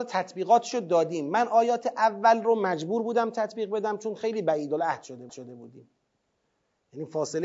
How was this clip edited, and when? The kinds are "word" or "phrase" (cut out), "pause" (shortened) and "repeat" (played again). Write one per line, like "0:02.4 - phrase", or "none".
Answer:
0:05.3 - repeat